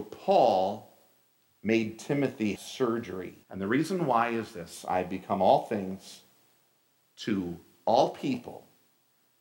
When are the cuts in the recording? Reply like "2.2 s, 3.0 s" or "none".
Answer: 2.6 s, 3.4 s